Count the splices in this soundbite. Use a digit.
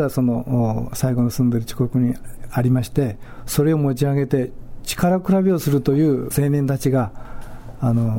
1